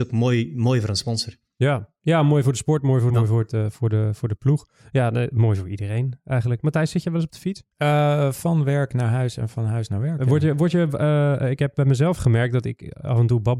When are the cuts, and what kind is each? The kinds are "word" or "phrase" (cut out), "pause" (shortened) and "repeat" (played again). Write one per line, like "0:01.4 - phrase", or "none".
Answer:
0:03.1 - phrase
0:07.7 - pause